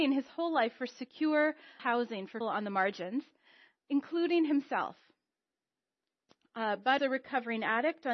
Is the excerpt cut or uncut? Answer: cut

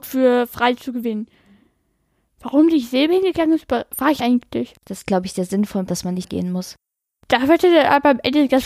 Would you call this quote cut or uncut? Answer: cut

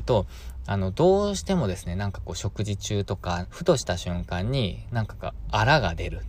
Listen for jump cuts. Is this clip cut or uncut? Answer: cut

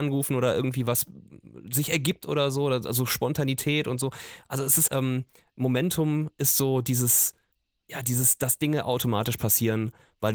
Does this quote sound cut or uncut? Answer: cut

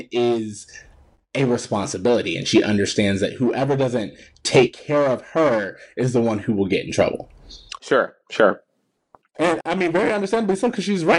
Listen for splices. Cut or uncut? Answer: uncut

